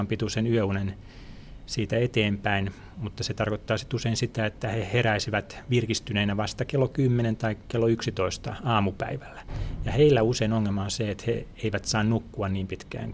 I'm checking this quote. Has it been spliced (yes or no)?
no